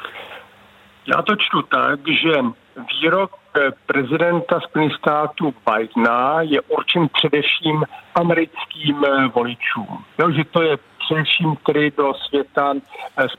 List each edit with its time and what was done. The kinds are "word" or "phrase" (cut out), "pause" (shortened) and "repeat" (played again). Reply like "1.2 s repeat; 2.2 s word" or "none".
3.8 s pause; 8.1 s pause